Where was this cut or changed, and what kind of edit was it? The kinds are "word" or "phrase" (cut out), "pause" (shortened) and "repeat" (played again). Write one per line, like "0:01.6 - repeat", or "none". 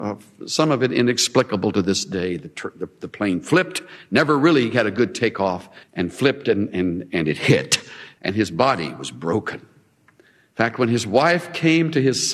0:05.8 - pause